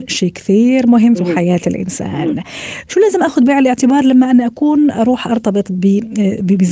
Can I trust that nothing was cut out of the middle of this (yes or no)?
no